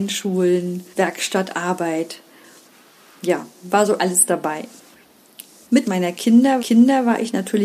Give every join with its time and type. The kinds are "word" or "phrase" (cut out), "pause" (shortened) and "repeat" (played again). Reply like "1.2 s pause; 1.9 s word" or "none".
0.9 s pause; 4.0 s word; 5.8 s phrase; 6.6 s repeat